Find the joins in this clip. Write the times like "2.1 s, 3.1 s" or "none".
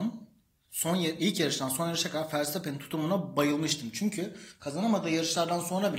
none